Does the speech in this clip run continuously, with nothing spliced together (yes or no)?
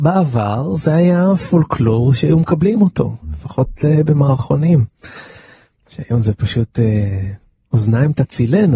yes